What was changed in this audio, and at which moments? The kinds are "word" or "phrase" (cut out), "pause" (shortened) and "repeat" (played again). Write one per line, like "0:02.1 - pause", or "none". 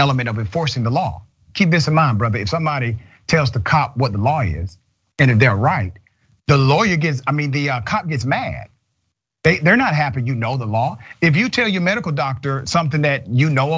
none